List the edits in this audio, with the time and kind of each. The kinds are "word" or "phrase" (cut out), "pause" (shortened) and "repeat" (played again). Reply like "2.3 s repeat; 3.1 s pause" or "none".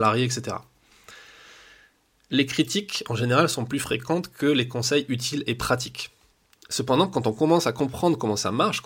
6.5 s pause